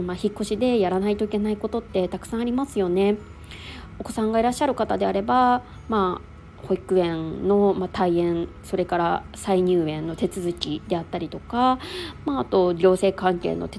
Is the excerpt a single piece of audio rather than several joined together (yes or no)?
yes